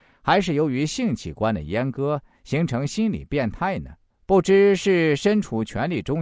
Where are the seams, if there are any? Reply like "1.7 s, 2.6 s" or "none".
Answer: 4.1 s